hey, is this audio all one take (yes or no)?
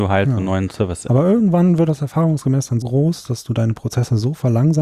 no